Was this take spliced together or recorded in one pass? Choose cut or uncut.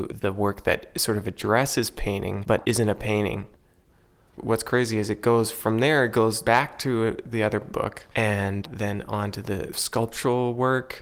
cut